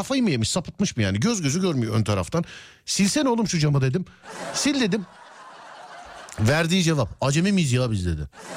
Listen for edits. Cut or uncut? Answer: uncut